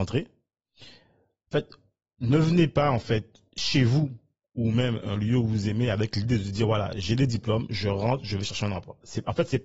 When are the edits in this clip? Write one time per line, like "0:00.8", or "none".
none